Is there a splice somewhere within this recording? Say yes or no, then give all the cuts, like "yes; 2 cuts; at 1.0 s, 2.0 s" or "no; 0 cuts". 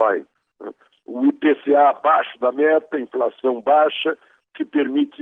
no; 0 cuts